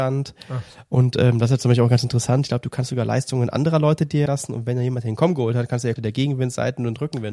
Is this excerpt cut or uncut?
cut